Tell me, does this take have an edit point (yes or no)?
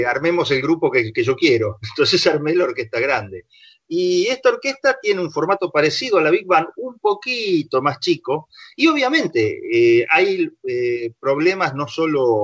no